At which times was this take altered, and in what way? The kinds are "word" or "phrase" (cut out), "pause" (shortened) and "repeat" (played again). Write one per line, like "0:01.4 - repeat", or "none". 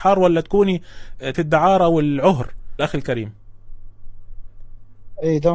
0:01.3 - word
0:02.8 - word